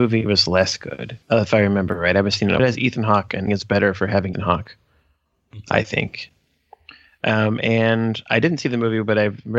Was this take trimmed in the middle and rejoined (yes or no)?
yes